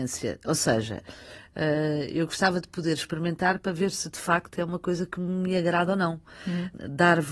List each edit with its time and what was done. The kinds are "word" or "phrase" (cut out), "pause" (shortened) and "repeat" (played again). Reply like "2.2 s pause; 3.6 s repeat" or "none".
none